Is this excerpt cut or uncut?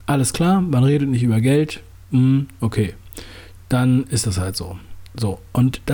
uncut